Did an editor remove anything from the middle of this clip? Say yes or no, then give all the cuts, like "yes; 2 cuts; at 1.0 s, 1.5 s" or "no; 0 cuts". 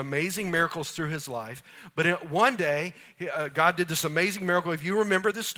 no; 0 cuts